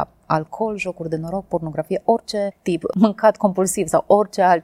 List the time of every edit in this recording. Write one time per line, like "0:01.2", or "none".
none